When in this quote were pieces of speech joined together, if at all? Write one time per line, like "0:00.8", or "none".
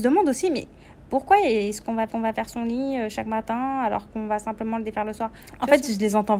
0:02.1